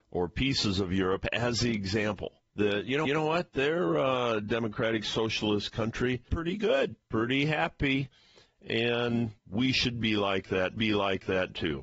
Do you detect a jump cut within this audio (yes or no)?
yes